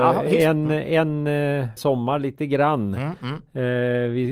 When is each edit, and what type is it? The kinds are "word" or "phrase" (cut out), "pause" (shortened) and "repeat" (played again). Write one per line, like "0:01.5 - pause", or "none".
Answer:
0:01.8 - phrase

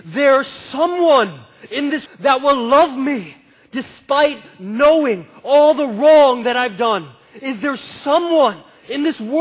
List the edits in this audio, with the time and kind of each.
0:02.1 - word

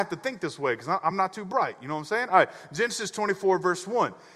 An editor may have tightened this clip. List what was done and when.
none

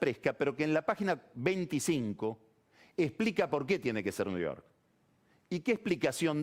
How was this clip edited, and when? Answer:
none

